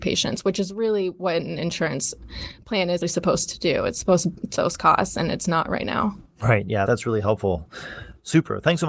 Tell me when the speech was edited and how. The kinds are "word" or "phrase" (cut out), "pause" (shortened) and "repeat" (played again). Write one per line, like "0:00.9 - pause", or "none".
0:03.0 - word
0:04.6 - word
0:06.9 - word

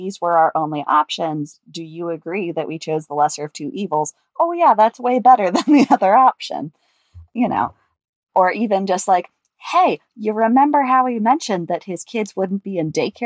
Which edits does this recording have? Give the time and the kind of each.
none

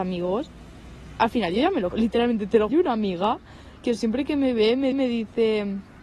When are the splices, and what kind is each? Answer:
0:01.9 - word
0:02.7 - phrase
0:03.8 - word
0:04.9 - repeat

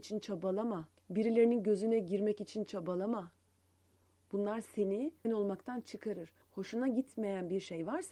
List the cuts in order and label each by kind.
0:01.0 - pause
0:05.2 - word
0:06.4 - pause

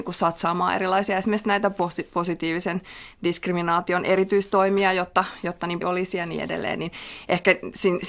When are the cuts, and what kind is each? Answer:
0:05.8 - phrase

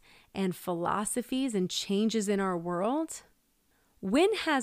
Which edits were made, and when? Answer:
none

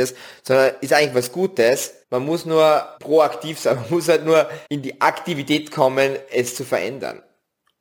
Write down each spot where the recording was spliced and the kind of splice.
0:02.0 - pause
0:03.0 - pause
0:04.7 - pause

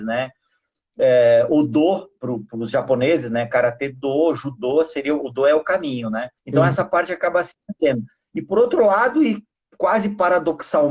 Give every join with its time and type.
0:06.4 - pause

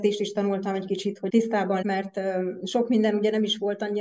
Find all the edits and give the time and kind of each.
0:01.3 - phrase
0:01.8 - word

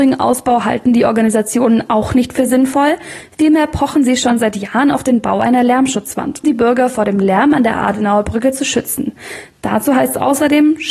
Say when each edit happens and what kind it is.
0:06.4 - word

